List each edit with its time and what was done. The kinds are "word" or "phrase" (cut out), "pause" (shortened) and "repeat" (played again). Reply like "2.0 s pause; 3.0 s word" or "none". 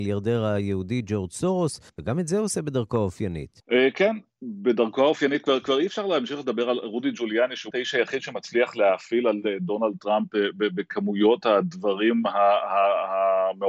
1.9 s pause; 7.7 s word